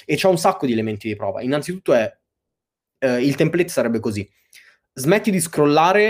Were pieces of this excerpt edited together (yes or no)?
no